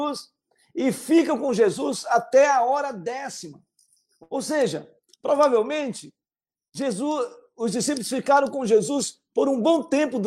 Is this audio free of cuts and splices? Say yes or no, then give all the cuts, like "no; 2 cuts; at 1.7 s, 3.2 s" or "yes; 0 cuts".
yes; 0 cuts